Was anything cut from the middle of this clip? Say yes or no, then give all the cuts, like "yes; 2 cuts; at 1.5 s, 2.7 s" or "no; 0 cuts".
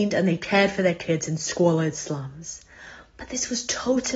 no; 0 cuts